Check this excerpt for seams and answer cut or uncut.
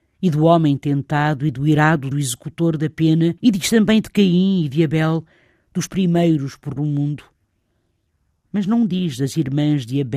cut